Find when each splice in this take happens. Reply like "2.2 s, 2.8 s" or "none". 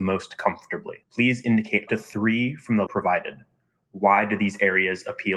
1.0 s, 1.9 s, 2.9 s